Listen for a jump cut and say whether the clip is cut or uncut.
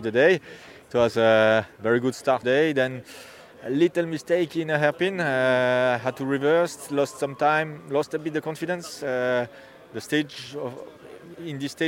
cut